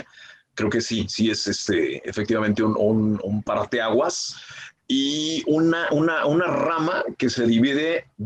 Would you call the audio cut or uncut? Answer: uncut